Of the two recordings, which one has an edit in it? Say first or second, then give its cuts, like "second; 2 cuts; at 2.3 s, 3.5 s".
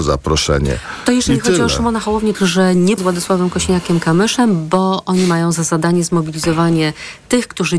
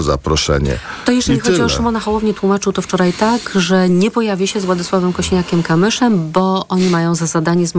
first; 2 cuts; at 2.3 s, 3.0 s